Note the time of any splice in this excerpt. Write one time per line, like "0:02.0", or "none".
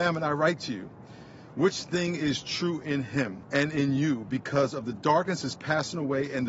none